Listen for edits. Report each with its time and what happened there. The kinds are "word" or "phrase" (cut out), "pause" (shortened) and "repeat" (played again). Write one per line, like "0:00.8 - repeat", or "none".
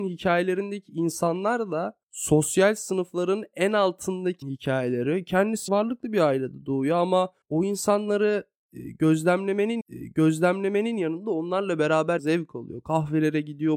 0:02.0 - pause
0:04.4 - phrase
0:05.7 - word
0:07.4 - pause
0:09.8 - repeat
0:12.2 - word